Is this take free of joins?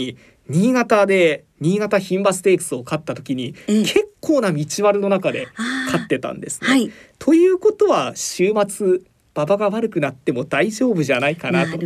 yes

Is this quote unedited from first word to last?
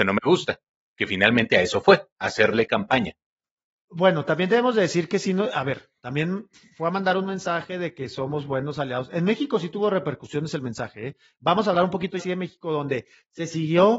no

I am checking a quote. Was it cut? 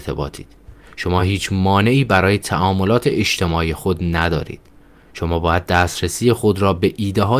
no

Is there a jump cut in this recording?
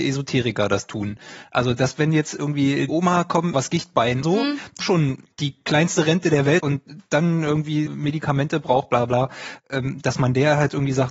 yes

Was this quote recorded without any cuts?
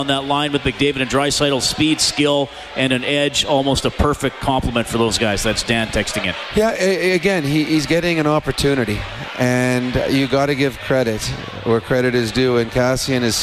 yes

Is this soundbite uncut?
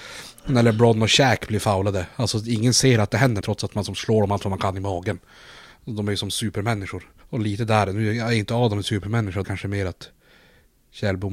no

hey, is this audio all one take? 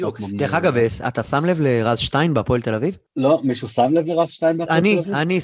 no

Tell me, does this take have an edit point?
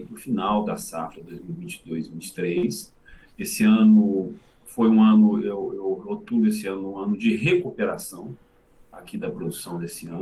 no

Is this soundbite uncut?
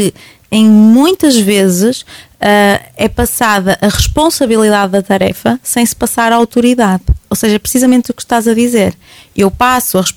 yes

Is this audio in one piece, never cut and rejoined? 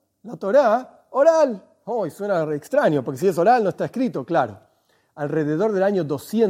yes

